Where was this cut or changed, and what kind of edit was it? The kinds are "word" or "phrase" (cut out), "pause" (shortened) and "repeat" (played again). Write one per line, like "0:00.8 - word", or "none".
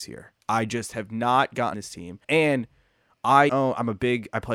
0:01.7 - word
0:02.2 - pause
0:03.5 - word